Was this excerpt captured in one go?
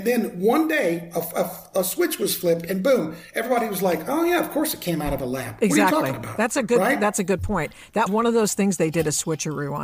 no; 1 cut; at 8.1 s

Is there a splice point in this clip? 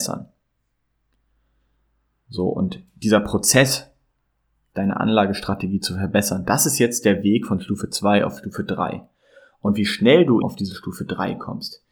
yes; 1 cut; at 10.4 s

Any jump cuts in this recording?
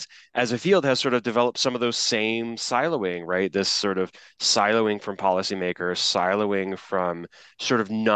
no; 0 cuts

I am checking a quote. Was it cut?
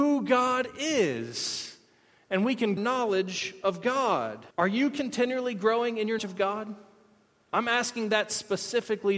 yes; 3 cuts; at 2.8 s, 4.5 s, 6.2 s

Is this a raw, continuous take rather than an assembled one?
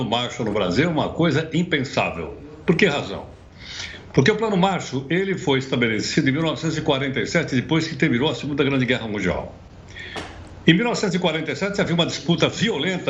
yes; 0 cuts

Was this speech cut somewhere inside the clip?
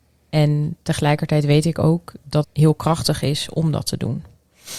yes; 1 cut; at 2.4 s

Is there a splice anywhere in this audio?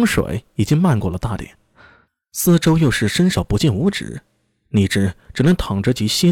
no; 0 cuts

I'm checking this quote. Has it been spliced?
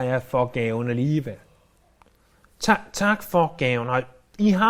no; 0 cuts

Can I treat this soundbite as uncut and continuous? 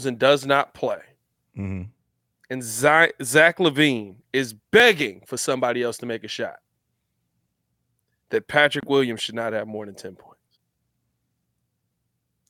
yes; 0 cuts

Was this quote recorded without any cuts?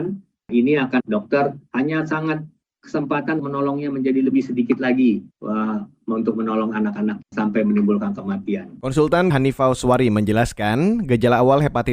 no; 6 cuts; at 1.0 s, 1.7 s, 3.4 s, 5.3 s, 7.2 s, 9.3 s

